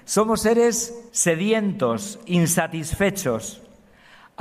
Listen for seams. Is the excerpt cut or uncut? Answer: cut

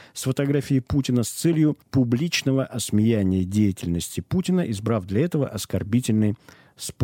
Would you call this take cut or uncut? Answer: cut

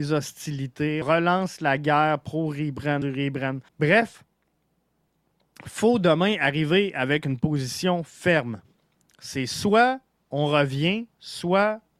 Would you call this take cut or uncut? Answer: cut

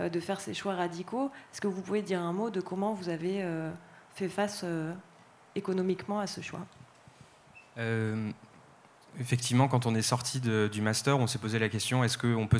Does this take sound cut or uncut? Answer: uncut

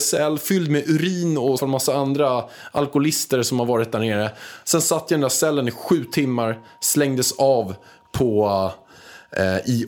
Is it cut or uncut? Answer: cut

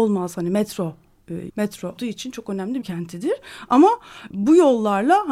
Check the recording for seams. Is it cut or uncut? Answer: cut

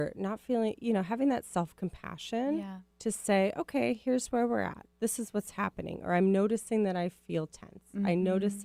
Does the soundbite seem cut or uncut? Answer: cut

